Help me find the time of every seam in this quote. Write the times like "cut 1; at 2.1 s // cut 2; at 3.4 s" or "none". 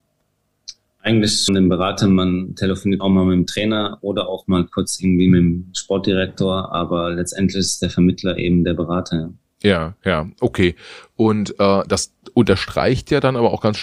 cut 1; at 1.5 s // cut 2; at 3.0 s